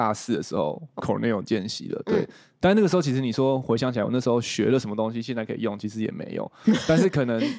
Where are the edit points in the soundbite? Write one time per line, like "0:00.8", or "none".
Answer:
0:01.0